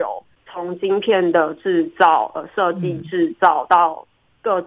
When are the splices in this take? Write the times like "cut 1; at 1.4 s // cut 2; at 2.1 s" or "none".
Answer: none